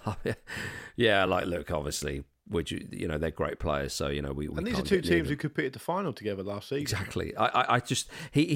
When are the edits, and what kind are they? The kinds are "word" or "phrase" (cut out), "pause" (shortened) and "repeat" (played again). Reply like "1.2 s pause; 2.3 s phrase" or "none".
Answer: none